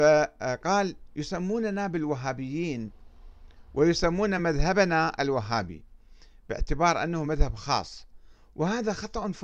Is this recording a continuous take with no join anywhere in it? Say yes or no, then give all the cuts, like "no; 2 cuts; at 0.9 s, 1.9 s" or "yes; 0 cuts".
yes; 0 cuts